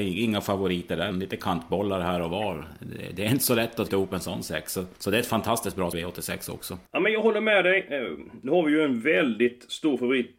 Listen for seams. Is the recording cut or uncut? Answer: cut